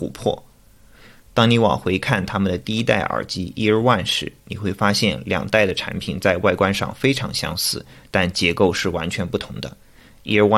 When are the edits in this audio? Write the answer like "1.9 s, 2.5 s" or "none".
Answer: none